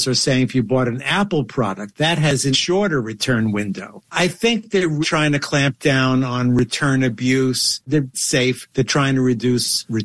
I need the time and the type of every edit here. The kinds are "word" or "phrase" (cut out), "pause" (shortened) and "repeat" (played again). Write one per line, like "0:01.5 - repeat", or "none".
0:02.5 - word
0:05.0 - word
0:08.1 - phrase